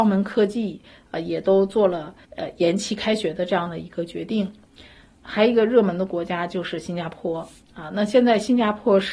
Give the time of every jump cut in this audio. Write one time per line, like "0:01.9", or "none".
0:02.2